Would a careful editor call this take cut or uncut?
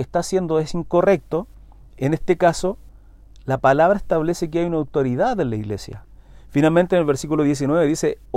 uncut